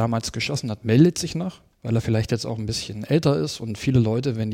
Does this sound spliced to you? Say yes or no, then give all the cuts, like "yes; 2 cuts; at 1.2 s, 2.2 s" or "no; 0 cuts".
yes; 1 cut; at 1.7 s